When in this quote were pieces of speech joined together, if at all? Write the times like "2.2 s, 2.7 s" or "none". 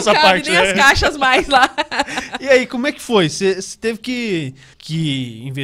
4.7 s